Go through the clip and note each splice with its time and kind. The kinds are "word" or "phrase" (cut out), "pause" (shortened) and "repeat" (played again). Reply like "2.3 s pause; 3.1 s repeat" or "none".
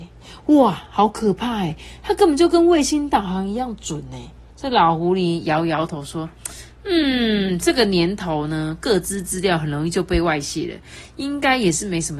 4.5 s pause